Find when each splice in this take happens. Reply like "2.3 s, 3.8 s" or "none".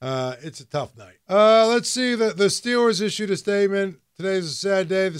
1.2 s